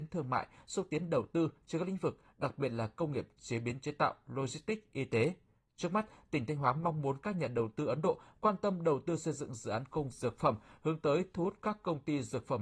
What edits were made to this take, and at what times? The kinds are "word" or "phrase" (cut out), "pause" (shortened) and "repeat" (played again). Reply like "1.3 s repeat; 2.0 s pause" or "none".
10.1 s word